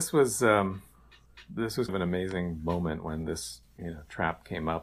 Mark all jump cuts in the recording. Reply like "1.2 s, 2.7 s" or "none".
1.9 s, 3.7 s